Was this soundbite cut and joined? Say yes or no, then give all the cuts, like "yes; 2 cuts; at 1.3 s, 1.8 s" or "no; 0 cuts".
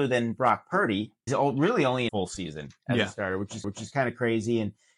yes; 3 cuts; at 1.3 s, 2.1 s, 3.6 s